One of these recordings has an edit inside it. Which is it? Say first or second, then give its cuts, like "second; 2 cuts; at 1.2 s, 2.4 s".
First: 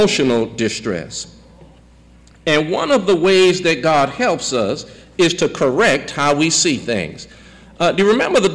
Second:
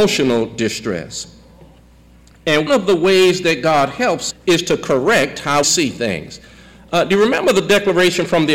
second; 3 cuts; at 2.7 s, 4.3 s, 5.6 s